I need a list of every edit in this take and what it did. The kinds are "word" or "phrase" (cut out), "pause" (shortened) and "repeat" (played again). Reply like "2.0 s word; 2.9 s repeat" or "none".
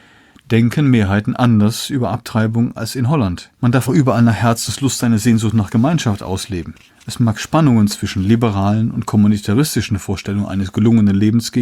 3.5 s pause; 3.9 s word; 6.9 s pause